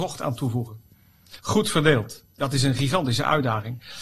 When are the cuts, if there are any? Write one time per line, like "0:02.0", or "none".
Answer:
0:01.4